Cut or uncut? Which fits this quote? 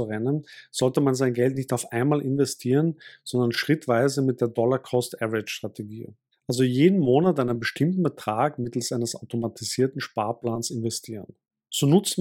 uncut